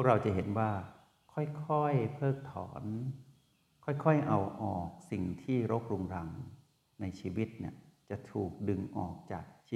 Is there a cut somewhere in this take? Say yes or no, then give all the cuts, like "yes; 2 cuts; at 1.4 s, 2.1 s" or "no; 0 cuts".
no; 0 cuts